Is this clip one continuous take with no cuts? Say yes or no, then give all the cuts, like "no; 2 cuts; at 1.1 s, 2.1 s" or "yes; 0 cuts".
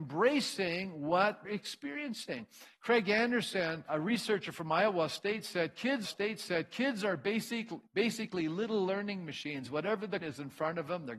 no; 5 cuts; at 1.4 s, 3.9 s, 6.0 s, 7.9 s, 10.2 s